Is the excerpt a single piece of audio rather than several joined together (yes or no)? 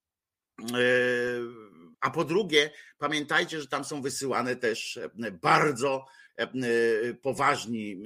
no